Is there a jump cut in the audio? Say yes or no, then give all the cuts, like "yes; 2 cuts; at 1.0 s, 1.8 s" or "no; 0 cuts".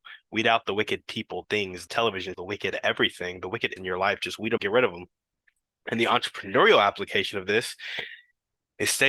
yes; 5 cuts; at 1.4 s, 1.9 s, 2.3 s, 3.8 s, 4.6 s